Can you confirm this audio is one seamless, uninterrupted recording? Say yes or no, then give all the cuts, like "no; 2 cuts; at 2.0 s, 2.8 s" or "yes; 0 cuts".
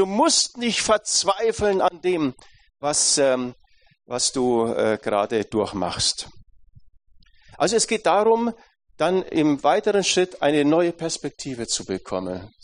yes; 0 cuts